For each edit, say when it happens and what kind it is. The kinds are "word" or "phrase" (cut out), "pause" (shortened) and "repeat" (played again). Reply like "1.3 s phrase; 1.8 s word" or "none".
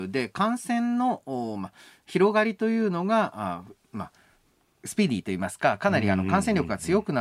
none